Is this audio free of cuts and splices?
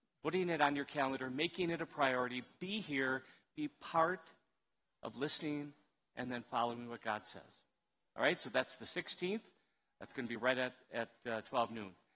yes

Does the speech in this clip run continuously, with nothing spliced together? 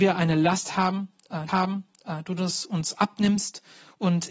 no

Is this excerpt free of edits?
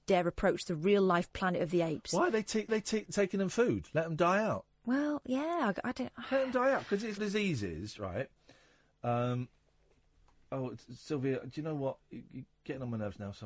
no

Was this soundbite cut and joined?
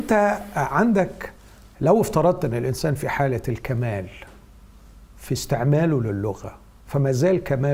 no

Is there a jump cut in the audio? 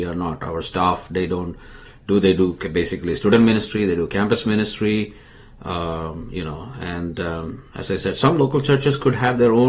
no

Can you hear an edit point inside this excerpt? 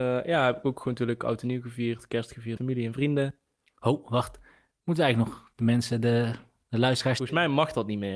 yes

